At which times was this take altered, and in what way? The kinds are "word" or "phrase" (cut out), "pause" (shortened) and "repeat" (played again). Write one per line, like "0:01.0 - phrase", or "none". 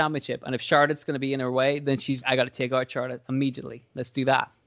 0:02.2 - word

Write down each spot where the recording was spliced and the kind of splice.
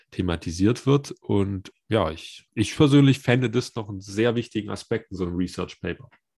0:01.7 - word
0:02.5 - pause

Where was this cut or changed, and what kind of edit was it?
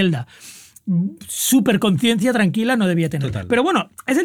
none

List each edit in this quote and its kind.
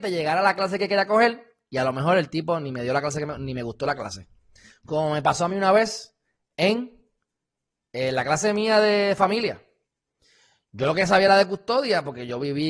none

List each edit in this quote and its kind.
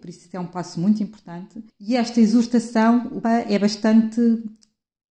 0:01.7 - pause
0:03.2 - word

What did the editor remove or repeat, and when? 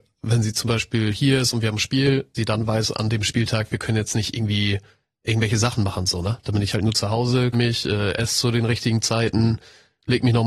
0:02.3 - word
0:07.5 - word

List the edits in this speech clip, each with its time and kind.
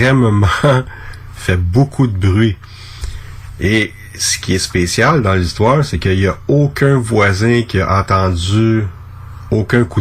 none

